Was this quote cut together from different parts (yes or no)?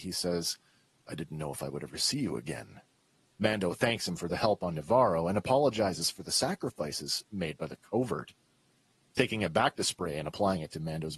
no